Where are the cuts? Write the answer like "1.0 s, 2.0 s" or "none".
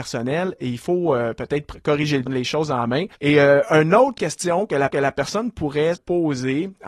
2.3 s, 3.1 s, 4.2 s, 4.9 s, 5.9 s